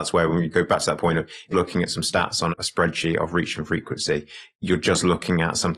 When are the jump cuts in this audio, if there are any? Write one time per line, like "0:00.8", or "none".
0:01.5
0:02.5